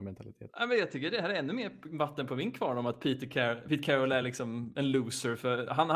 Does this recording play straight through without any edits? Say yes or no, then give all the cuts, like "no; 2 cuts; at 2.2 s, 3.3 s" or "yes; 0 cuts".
yes; 0 cuts